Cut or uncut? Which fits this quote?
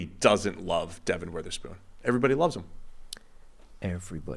uncut